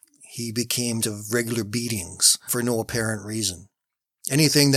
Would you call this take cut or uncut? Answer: cut